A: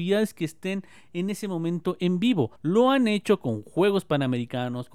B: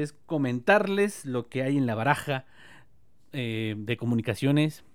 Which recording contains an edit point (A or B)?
A